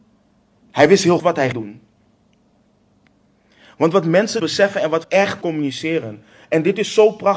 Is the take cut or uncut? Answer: cut